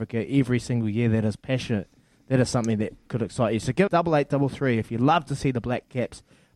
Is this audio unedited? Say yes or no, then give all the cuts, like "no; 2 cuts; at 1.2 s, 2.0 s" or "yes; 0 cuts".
no; 1 cut; at 3.9 s